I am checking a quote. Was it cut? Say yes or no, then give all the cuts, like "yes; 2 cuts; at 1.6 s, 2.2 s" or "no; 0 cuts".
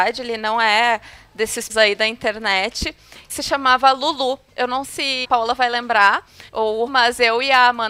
yes; 6 cuts; at 1.7 s, 3.3 s, 4.8 s, 5.2 s, 6.5 s, 6.9 s